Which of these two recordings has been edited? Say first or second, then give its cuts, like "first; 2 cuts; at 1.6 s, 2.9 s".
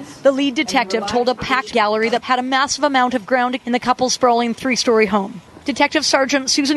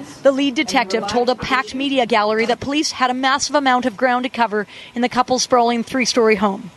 first; 3 cuts; at 1.7 s, 2.2 s, 3.6 s